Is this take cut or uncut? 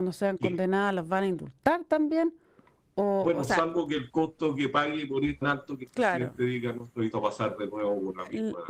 cut